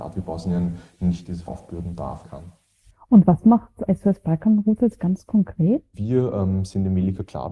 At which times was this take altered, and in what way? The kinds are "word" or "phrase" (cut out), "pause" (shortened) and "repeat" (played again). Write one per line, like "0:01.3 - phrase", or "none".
0:01.5 - word
0:02.2 - word
0:03.9 - word